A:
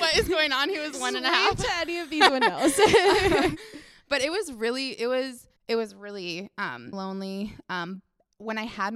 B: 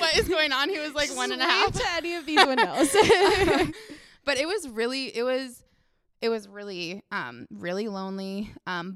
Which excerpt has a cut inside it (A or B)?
A